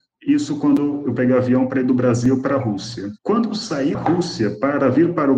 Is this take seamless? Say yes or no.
no